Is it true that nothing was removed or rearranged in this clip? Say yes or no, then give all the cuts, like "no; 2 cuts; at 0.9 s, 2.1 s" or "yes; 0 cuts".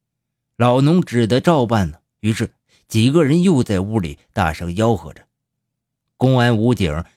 yes; 0 cuts